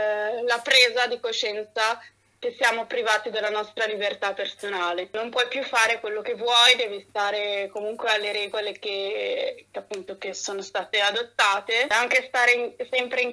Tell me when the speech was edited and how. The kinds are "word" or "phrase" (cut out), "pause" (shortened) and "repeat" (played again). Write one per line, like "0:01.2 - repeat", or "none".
none